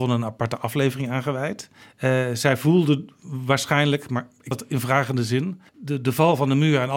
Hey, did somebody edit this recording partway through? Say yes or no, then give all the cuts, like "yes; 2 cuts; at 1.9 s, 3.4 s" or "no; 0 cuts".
yes; 3 cuts; at 1.8 s, 4.5 s, 5.7 s